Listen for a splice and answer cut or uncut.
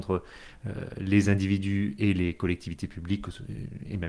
uncut